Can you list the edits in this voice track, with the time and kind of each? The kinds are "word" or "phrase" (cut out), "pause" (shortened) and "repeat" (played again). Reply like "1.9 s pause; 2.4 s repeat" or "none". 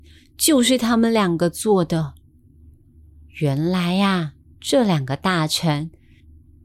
none